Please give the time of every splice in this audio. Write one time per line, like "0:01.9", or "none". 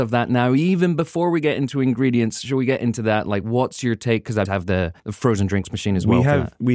0:04.5
0:05.0